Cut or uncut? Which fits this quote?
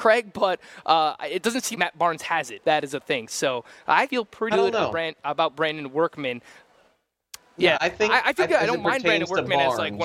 cut